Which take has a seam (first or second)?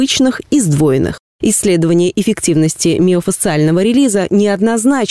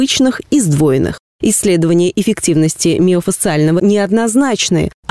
second